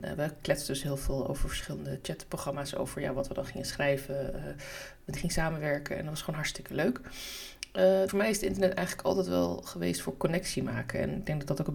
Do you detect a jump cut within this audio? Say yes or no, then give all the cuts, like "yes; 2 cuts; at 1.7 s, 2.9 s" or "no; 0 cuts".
yes; 2 cuts; at 5.2 s, 8.1 s